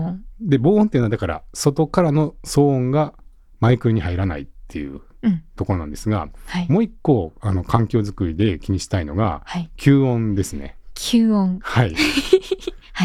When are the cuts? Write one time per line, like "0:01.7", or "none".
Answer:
none

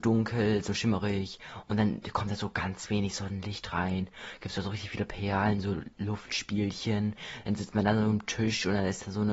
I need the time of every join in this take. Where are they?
none

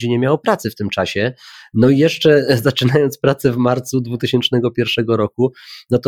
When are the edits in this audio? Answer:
none

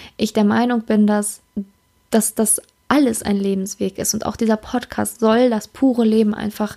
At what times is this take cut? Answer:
none

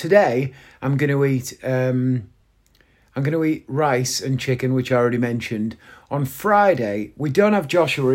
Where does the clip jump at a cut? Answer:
none

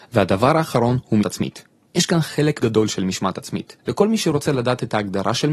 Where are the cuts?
0:01.2
0:02.6
0:03.8

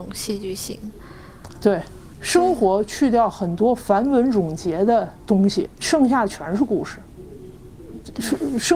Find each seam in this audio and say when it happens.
0:05.8

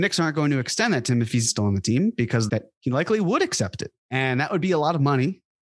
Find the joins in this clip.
0:01.5
0:02.5
0:04.0

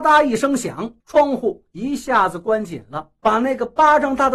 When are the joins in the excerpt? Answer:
0:01.0
0:03.2

